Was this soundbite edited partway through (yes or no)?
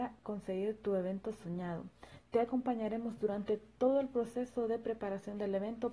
no